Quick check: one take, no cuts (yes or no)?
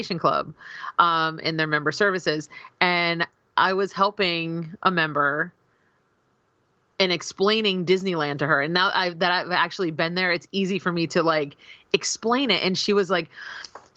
yes